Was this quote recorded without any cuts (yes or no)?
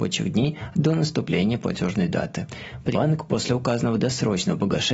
no